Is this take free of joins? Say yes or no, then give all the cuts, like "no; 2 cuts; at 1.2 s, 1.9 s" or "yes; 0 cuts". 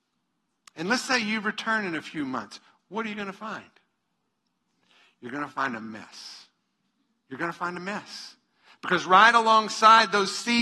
yes; 0 cuts